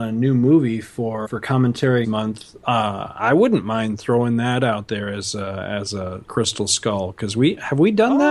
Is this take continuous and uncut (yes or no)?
no